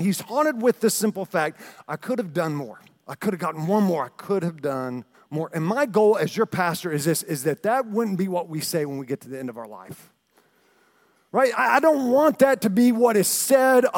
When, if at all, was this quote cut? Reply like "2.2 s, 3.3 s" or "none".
5.1 s